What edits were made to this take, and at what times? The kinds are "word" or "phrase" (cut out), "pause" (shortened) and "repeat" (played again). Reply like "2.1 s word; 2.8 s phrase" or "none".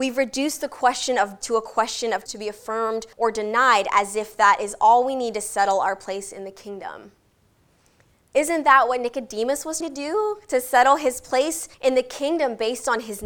1.4 s word; 2.3 s word; 3.1 s pause; 9.8 s word; 11.7 s pause